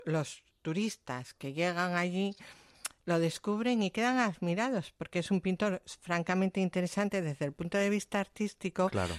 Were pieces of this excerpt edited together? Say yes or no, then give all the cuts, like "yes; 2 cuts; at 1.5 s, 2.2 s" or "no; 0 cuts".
no; 0 cuts